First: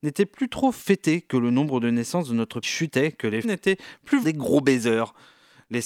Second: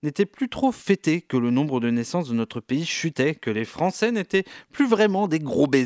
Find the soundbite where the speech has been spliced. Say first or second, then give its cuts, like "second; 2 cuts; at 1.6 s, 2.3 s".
first; 3 cuts; at 2.6 s, 3.4 s, 4.2 s